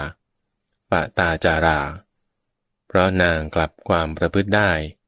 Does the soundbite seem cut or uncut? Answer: uncut